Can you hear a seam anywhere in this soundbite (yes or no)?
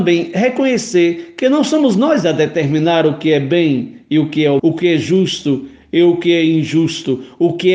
yes